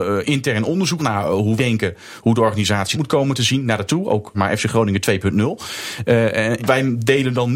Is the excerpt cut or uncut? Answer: cut